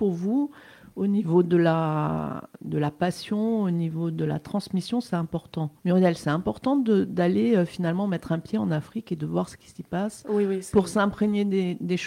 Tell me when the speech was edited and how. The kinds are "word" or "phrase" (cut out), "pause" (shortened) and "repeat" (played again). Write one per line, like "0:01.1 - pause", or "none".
0:05.8 - pause